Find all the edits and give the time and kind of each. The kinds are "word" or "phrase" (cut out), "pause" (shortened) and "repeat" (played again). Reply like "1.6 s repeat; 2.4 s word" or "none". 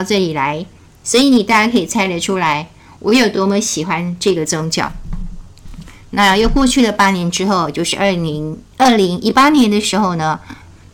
none